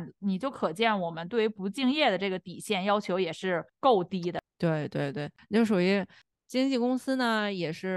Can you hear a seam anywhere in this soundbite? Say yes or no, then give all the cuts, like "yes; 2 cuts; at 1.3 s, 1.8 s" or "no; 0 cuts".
no; 0 cuts